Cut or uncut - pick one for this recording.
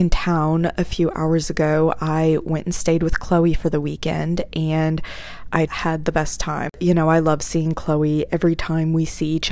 cut